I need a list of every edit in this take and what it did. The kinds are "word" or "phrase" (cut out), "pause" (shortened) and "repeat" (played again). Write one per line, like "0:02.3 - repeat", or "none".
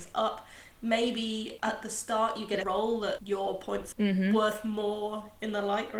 0:01.6 - word
0:02.6 - word
0:03.2 - word
0:03.9 - word